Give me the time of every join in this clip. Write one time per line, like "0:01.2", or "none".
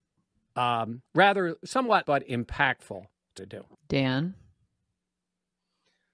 0:01.1
0:02.0
0:03.4
0:03.7